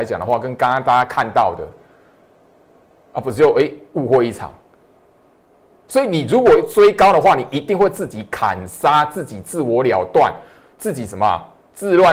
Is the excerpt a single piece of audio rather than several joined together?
yes; 0 cuts

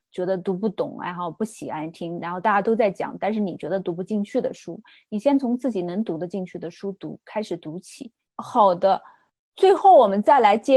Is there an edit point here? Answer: no; 0 cuts

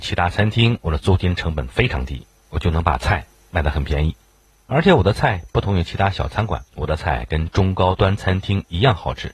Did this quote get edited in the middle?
yes; 1 cut; at 6.7 s

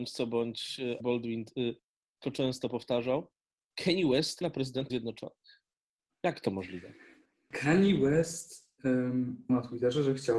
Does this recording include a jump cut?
yes; 5 cuts; at 1.0 s, 2.2 s, 4.4 s, 4.9 s, 9.5 s

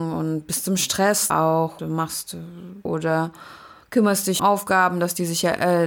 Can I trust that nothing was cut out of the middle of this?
no; 4 cuts; at 1.3 s, 1.8 s, 2.9 s, 4.4 s

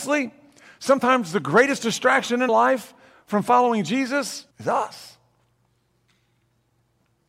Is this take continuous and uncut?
no; 2 cuts; at 2.5 s, 4.5 s

